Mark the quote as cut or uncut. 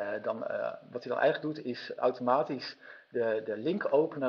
uncut